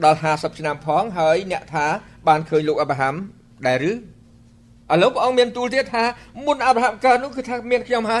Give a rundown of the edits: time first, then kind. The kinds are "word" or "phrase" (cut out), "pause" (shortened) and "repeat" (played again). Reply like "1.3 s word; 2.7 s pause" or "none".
none